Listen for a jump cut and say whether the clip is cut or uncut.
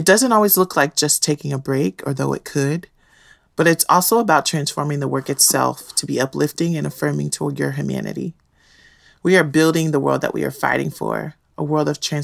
uncut